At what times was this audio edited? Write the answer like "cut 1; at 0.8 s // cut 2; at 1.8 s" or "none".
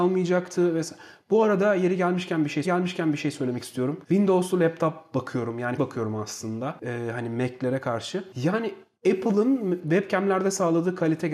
cut 1; at 2.6 s // cut 2; at 5.8 s // cut 3; at 9.0 s

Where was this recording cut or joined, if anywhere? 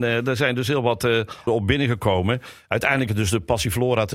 cut 1; at 1.5 s // cut 2; at 3.1 s

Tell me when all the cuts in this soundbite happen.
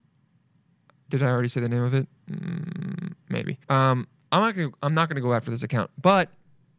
cut 1; at 2.2 s // cut 2; at 3.6 s

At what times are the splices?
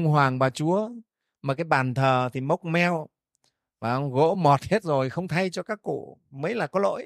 none

